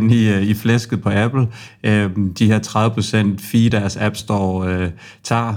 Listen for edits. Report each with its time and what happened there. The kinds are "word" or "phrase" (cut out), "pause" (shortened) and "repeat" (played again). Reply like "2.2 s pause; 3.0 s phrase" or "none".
none